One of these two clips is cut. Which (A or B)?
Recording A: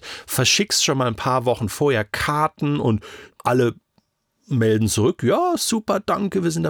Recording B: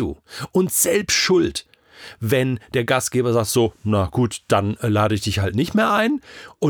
A